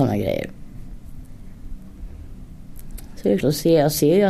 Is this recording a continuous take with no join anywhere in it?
no; 1 cut; at 3.4 s

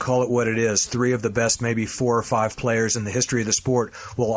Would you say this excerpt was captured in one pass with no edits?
yes; 0 cuts

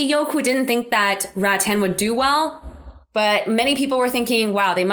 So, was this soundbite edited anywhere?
no; 0 cuts

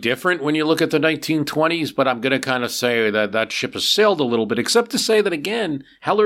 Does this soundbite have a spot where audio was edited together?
no; 0 cuts

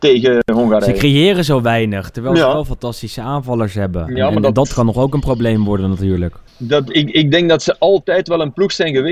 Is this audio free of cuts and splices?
no; 1 cut; at 6.5 s

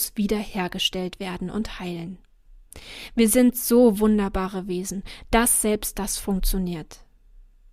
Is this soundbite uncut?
yes; 0 cuts

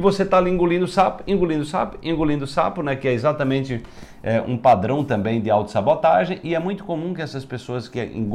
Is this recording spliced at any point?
no; 0 cuts

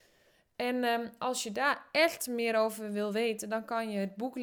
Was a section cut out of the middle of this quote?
no; 0 cuts

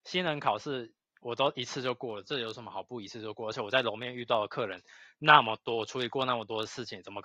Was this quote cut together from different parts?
no; 0 cuts

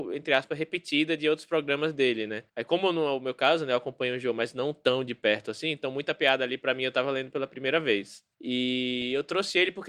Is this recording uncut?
yes; 0 cuts

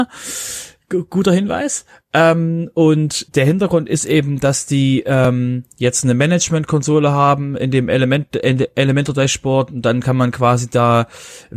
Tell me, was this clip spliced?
yes; 1 cut; at 3.3 s

